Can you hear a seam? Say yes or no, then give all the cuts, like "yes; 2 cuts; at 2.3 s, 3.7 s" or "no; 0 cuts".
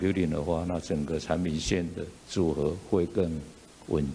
yes; 1 cut; at 2.2 s